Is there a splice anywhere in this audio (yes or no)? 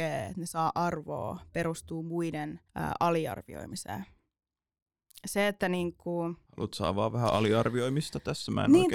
yes